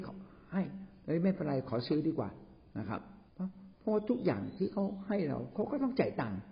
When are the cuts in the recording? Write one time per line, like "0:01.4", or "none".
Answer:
0:03.3